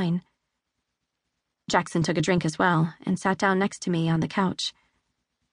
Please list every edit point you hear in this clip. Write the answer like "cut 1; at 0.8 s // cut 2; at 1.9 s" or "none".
none